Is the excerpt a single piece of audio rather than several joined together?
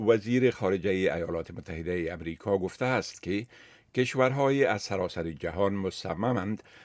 yes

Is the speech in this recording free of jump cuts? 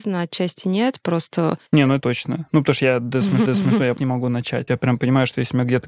no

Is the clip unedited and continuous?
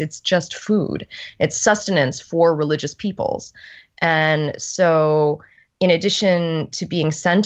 yes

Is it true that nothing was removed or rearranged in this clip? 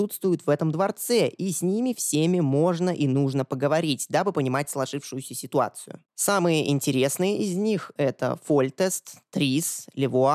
yes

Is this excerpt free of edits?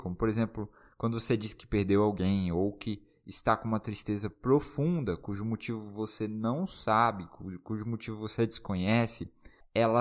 yes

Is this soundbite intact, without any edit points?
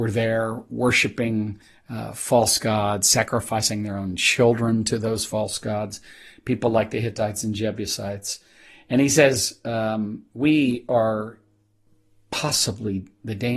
yes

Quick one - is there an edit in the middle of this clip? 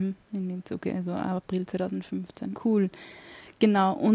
no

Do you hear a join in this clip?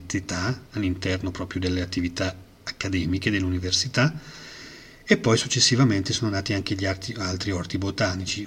no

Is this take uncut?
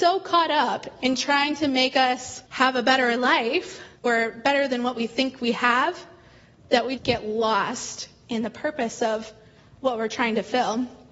no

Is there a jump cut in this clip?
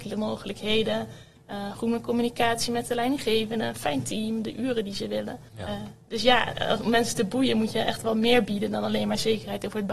yes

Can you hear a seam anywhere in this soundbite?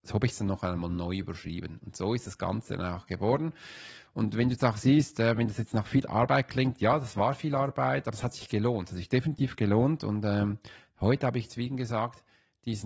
no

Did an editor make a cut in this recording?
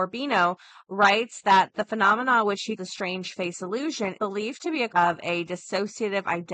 yes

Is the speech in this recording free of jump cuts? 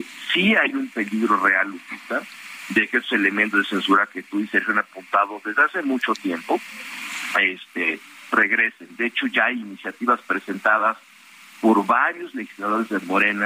yes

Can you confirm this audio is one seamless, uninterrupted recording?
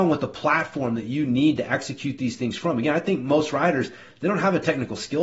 yes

